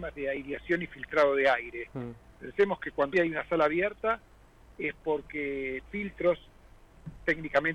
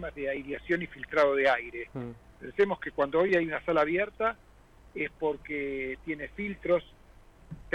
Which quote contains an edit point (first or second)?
first